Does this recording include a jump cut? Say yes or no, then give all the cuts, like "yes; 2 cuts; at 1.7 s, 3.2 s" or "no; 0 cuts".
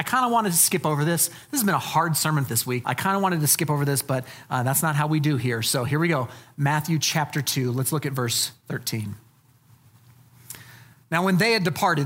yes; 2 cuts; at 2.5 s, 2.8 s